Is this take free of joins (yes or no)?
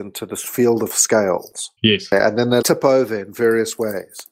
no